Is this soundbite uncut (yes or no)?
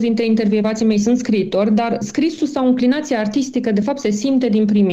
yes